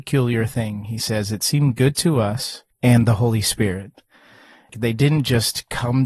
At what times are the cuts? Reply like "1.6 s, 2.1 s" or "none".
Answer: none